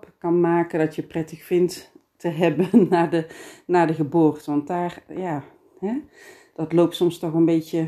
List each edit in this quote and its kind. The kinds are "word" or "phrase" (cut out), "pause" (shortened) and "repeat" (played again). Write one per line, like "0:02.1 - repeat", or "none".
none